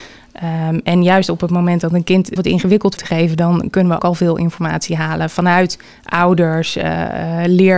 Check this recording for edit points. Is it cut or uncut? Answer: cut